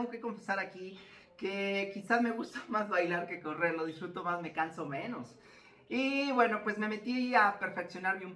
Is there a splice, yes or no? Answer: no